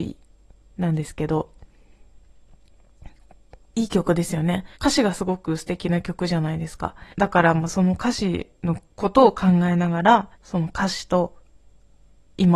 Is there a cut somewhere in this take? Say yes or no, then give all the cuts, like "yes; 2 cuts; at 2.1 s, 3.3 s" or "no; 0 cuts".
yes; 5 cuts; at 3.6 s, 4.7 s, 7.1 s, 8.5 s, 10.3 s